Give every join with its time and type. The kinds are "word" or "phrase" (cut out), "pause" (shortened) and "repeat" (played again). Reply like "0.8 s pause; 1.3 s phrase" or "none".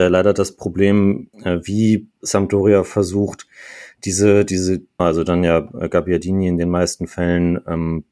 1.3 s pause; 2.2 s pause; 5.0 s phrase

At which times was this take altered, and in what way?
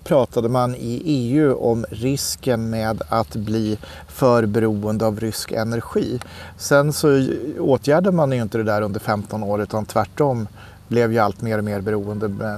none

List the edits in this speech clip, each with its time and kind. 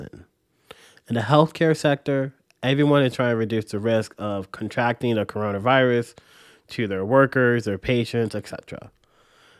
none

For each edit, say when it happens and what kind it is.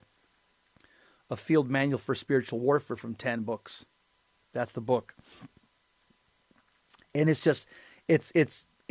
none

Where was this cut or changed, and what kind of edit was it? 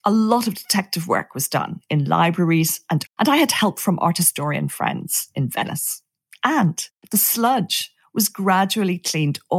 3.1 s word

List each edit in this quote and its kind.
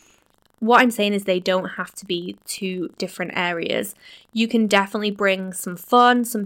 none

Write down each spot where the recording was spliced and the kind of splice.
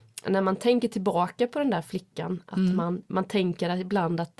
none

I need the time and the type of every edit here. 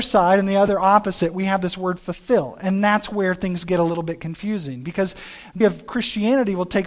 5.6 s word

